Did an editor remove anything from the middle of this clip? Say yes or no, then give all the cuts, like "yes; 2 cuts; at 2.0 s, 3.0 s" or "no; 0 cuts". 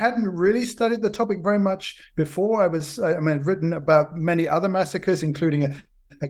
no; 0 cuts